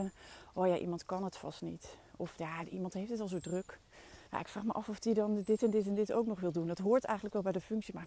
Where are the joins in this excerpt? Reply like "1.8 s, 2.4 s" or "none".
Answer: 4.3 s